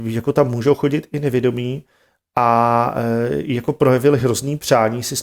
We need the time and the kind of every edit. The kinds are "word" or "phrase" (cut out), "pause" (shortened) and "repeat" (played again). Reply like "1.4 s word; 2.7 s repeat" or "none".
none